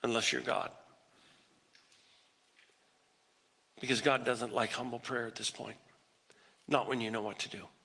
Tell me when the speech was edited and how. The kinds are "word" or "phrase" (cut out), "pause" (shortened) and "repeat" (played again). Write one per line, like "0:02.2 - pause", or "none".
none